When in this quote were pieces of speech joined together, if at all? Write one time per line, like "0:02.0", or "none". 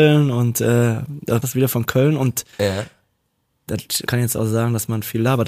0:01.4
0:04.1